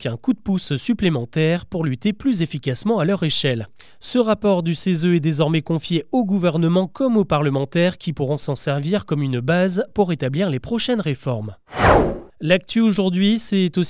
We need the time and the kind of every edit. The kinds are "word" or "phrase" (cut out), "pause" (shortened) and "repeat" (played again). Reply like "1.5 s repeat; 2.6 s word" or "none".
12.3 s pause